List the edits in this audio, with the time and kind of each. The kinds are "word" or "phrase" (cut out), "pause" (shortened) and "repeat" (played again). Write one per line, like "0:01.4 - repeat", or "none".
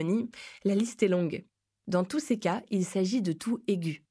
none